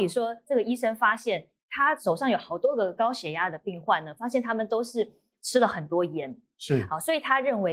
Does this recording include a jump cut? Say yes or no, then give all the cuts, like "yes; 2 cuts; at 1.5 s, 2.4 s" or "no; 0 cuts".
no; 0 cuts